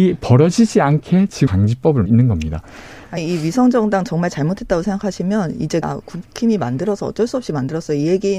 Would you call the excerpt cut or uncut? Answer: cut